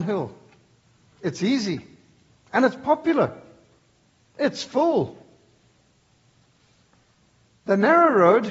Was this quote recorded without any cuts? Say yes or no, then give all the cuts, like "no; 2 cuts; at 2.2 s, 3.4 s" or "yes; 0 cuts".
yes; 0 cuts